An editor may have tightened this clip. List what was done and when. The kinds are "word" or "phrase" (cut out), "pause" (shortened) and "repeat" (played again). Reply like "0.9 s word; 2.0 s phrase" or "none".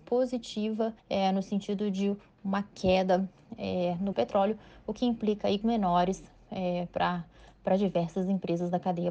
1.0 s pause; 4.1 s phrase; 5.6 s word